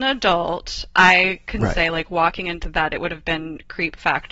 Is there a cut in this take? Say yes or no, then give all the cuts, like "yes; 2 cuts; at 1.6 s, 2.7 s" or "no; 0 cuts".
no; 0 cuts